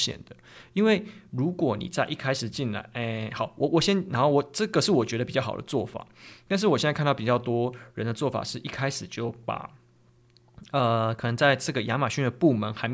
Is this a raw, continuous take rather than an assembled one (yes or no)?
yes